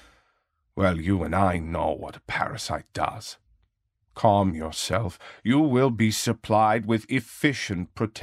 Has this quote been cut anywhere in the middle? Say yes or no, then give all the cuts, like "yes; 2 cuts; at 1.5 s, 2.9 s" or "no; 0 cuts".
no; 0 cuts